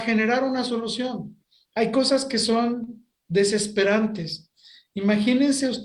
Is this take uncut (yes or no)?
yes